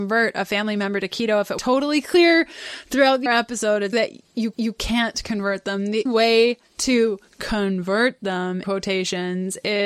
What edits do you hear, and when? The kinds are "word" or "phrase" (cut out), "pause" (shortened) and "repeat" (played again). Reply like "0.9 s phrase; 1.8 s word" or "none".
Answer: 1.6 s word; 3.3 s word; 3.9 s word; 4.5 s repeat; 6.1 s phrase; 8.6 s word

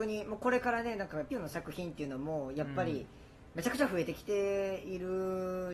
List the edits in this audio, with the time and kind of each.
1.3 s word

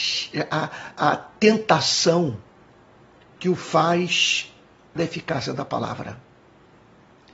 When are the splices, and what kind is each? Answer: 5.0 s word

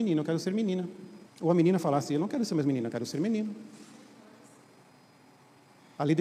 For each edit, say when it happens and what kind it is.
1.3 s pause

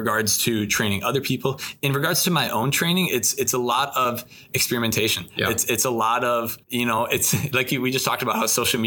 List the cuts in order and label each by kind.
6.6 s pause

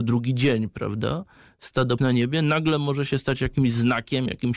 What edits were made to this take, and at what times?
2.0 s word

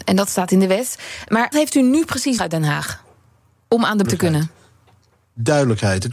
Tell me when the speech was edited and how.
1.5 s word; 2.4 s word; 4.0 s word

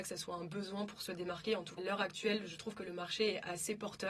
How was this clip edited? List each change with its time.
1.8 s phrase

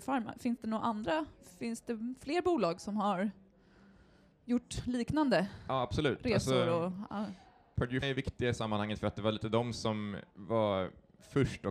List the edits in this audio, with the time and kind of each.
8.0 s word; 10.3 s pause

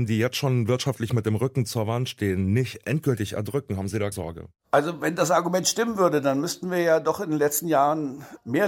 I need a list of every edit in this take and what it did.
4.1 s word

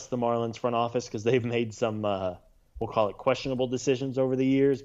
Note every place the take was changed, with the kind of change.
none

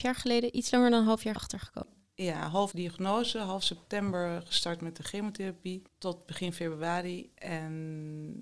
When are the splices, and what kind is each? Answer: 1.4 s word; 2.7 s word; 5.9 s pause

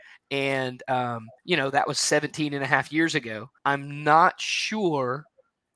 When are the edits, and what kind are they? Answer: 1.4 s pause; 3.6 s pause

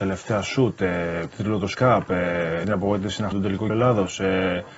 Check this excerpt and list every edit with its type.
1.3 s word; 1.7 s word; 2.6 s word; 3.3 s word; 3.7 s word

